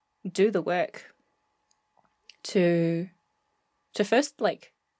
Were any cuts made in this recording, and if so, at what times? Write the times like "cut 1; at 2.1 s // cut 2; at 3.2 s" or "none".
none

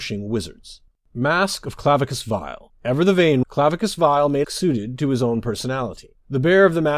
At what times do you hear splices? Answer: cut 1; at 0.9 s // cut 2; at 3.4 s // cut 3; at 4.4 s

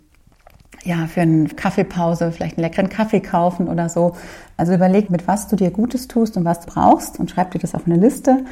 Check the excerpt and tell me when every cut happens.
cut 1; at 1.5 s // cut 2; at 5.1 s // cut 3; at 6.6 s

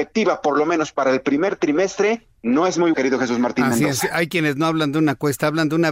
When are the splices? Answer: cut 1; at 2.3 s // cut 2; at 2.9 s

